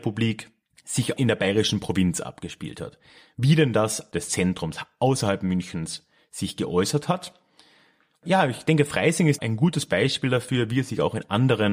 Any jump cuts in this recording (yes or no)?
yes